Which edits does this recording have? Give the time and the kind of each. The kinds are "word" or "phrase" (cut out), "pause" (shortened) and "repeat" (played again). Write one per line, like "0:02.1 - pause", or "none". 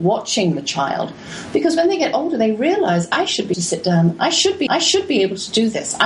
0:03.5 - word
0:04.7 - repeat